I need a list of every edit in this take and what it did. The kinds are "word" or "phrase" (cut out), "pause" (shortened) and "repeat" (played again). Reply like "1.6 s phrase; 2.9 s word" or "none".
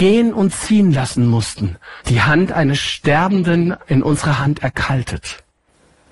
2.0 s pause